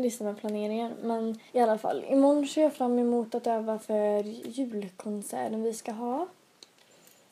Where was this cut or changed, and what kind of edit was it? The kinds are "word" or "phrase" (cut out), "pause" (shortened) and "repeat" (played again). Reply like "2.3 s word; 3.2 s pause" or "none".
1.5 s pause